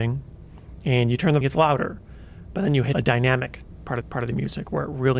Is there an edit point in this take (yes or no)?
yes